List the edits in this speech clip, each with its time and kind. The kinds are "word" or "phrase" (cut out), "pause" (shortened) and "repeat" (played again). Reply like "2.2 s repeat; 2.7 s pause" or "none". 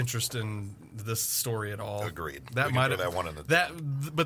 none